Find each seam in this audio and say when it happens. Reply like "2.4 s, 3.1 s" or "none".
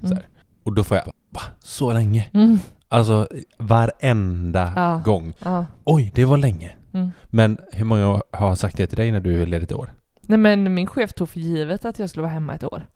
1.0 s